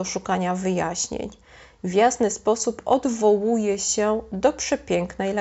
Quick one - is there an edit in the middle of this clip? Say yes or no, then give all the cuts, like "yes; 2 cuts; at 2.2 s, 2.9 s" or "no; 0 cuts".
no; 0 cuts